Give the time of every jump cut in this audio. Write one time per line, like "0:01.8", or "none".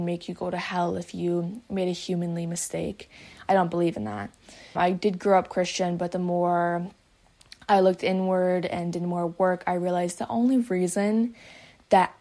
0:04.8